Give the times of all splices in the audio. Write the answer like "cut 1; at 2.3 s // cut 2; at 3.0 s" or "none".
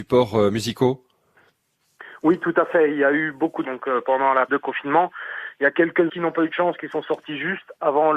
cut 1; at 3.6 s // cut 2; at 4.5 s // cut 3; at 6.1 s